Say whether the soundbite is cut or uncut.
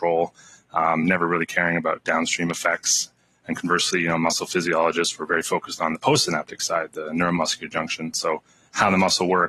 uncut